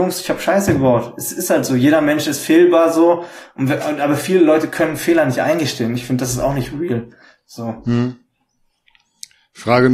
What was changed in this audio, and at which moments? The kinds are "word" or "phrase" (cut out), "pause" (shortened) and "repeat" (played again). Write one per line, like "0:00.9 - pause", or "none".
none